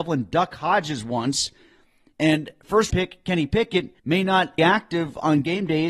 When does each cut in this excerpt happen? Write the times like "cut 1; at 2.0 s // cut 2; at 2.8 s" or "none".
cut 1; at 2.9 s // cut 2; at 4.0 s // cut 3; at 4.6 s